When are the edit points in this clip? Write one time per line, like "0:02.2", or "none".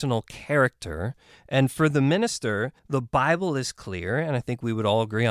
0:02.8